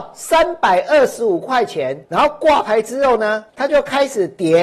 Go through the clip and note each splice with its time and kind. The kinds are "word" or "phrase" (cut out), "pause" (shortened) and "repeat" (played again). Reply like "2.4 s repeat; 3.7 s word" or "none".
2.0 s pause; 3.5 s pause